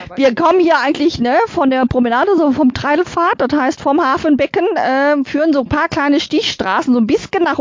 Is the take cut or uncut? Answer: uncut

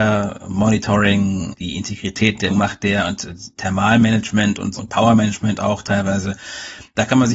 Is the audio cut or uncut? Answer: cut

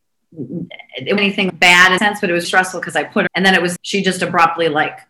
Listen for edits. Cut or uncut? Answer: cut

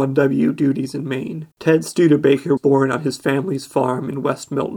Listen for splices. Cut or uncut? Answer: cut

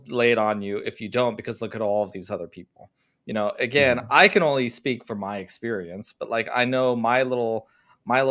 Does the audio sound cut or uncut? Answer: uncut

